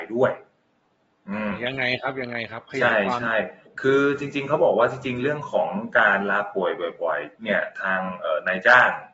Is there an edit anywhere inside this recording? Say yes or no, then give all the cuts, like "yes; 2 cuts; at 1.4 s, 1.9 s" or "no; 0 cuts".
yes; 2 cuts; at 3.7 s, 7.4 s